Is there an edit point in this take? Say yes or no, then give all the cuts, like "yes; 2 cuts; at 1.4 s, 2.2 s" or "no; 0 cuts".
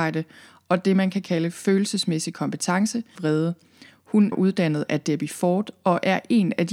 yes; 2 cuts; at 3.2 s, 4.3 s